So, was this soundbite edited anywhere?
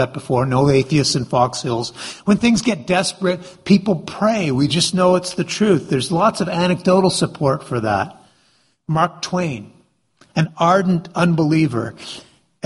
no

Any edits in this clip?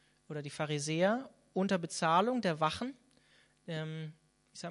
no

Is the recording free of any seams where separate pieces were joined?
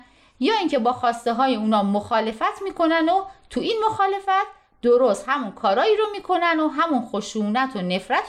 yes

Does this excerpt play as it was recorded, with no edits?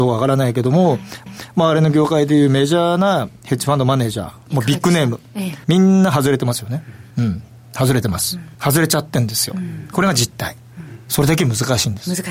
no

